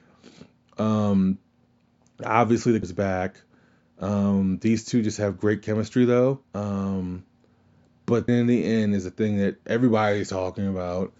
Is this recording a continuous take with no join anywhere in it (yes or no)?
no